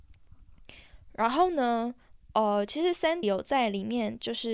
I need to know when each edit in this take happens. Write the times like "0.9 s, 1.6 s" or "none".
3.2 s